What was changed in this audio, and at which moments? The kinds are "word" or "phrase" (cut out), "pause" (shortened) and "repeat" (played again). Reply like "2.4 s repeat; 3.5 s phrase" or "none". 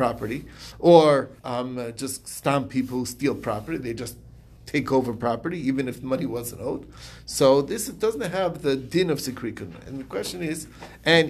1.4 s pause; 4.6 s pause